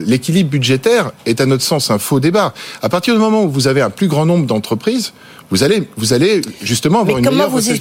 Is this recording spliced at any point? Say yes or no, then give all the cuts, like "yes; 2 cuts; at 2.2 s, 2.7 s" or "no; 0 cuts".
no; 0 cuts